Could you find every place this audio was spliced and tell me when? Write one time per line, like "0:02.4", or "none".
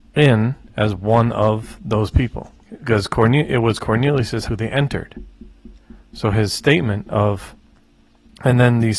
0:02.6
0:04.5